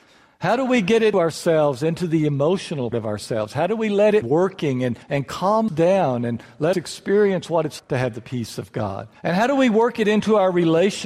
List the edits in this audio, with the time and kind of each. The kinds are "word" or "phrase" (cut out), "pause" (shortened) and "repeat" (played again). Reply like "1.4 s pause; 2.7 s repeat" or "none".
1.1 s word; 2.9 s word; 4.2 s phrase; 5.0 s pause; 5.7 s word; 6.7 s word; 7.8 s word; 9.2 s pause